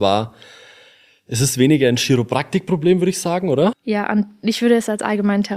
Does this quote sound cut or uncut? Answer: uncut